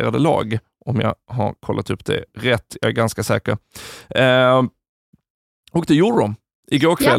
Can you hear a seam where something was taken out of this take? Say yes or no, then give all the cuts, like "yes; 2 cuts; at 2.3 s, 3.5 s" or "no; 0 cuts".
no; 0 cuts